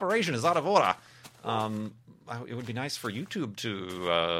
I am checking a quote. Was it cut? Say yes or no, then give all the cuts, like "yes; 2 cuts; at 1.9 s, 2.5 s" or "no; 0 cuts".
no; 0 cuts